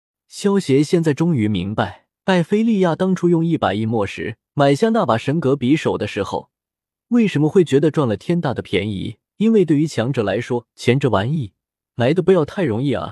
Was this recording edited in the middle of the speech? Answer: yes; 4 cuts; at 2.1 s, 4.5 s, 9.2 s, 10.7 s

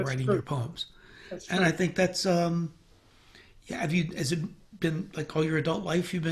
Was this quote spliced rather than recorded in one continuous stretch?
no; 0 cuts

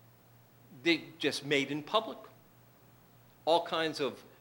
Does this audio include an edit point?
no; 0 cuts

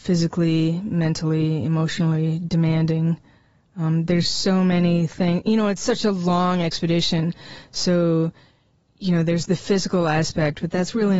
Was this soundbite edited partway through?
no; 0 cuts

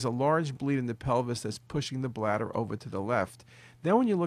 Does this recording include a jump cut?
no; 0 cuts

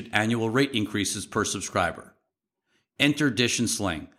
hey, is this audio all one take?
yes; 0 cuts

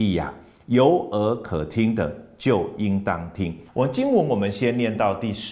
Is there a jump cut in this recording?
yes; 1 cut; at 3.7 s

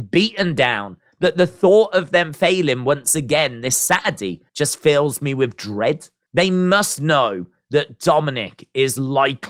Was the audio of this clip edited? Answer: yes; 1 cut; at 4.5 s

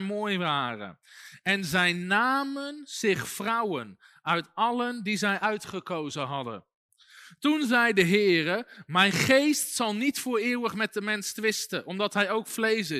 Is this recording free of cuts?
yes; 0 cuts

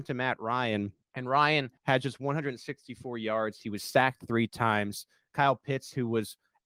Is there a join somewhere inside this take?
yes; 2 cuts; at 1.0 s, 1.8 s

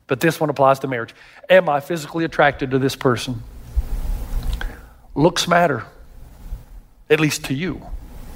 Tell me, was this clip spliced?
no; 0 cuts

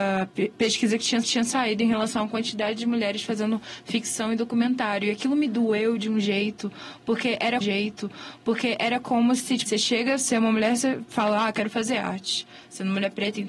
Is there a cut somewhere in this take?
yes; 3 cuts; at 1.2 s, 7.6 s, 9.7 s

